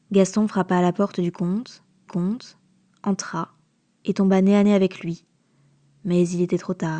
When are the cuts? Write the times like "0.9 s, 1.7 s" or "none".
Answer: 2.1 s